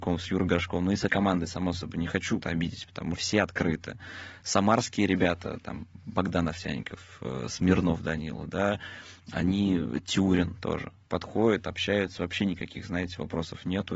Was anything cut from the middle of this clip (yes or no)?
yes